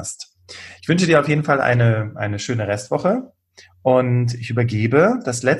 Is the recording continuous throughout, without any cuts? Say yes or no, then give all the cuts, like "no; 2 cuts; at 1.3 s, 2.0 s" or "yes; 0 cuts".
yes; 0 cuts